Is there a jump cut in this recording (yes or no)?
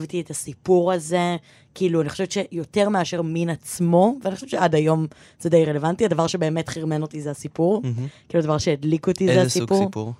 no